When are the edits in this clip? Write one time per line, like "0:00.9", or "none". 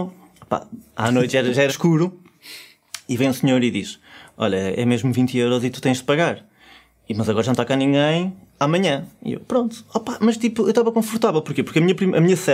0:01.7